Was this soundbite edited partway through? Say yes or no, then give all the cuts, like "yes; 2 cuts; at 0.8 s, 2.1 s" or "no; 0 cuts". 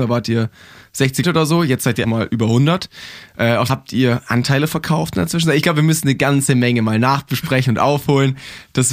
yes; 3 cuts; at 1.2 s, 2.0 s, 3.7 s